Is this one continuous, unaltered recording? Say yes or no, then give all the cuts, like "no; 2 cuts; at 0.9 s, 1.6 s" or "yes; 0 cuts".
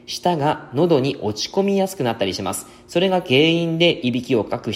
yes; 0 cuts